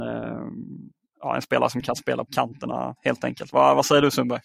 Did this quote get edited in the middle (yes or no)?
yes